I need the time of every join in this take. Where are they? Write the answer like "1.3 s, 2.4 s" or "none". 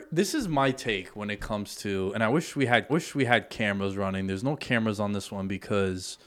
2.9 s

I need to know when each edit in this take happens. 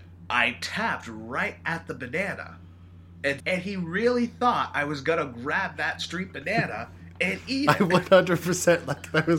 3.4 s

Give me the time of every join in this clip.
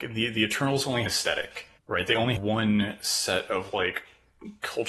1.1 s, 1.8 s, 2.4 s

